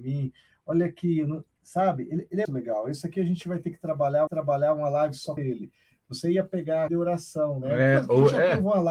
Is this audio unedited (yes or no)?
no